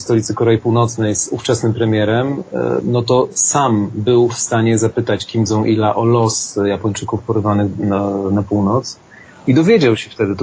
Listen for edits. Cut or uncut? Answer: uncut